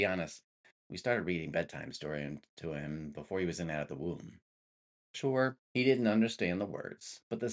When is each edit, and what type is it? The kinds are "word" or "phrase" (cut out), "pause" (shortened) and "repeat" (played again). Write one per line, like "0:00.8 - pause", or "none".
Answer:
0:05.6 - pause